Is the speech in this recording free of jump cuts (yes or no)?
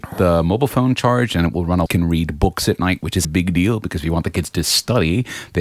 no